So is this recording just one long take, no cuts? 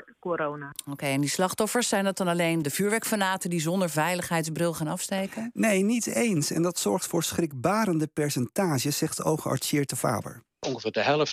no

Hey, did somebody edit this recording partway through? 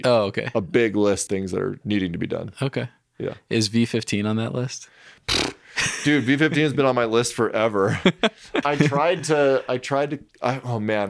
yes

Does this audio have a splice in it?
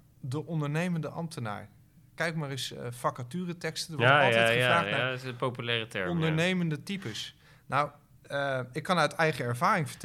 no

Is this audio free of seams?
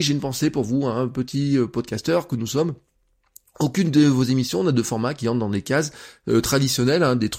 yes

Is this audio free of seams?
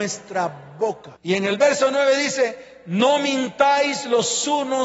no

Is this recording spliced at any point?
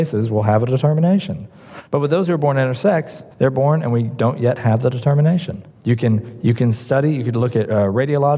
yes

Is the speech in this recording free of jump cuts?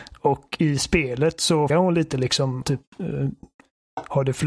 no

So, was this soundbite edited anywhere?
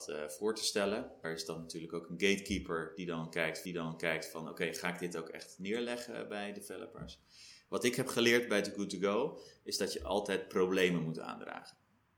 yes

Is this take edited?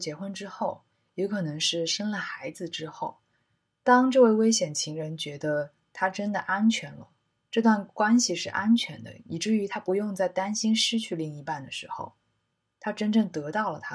no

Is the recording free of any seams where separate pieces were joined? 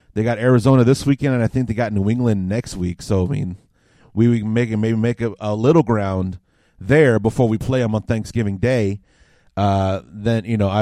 yes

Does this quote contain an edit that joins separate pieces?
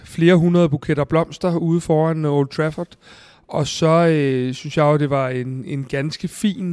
no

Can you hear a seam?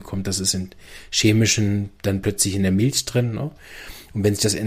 no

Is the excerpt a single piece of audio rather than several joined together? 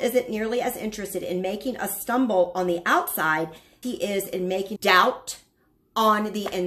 no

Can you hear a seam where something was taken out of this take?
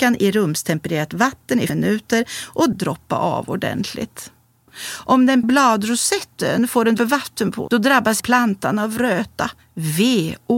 yes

